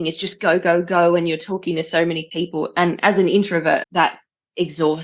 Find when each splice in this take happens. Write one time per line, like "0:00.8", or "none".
0:03.8